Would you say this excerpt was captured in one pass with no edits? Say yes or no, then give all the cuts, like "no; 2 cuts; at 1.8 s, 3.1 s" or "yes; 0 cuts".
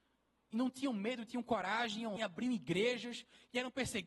no; 1 cut; at 2.2 s